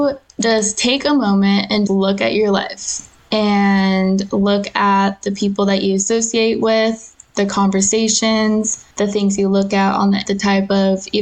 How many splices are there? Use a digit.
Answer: 3